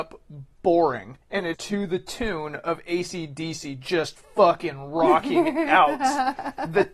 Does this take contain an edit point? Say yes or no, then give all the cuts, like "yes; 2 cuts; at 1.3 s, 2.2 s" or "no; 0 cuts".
yes; 3 cuts; at 1.2 s, 1.5 s, 4.2 s